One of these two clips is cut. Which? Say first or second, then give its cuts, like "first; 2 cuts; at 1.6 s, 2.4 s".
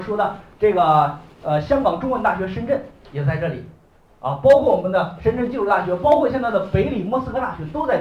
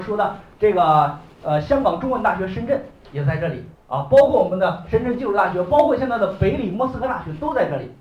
second; 1 cut; at 3.7 s